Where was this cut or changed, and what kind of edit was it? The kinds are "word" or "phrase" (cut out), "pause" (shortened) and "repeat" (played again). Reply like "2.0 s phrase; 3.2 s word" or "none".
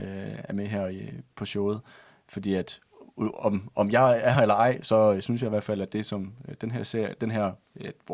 none